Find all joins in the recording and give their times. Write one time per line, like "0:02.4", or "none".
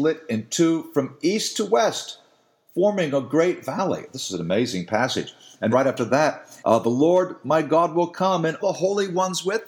0:05.7
0:06.6
0:08.6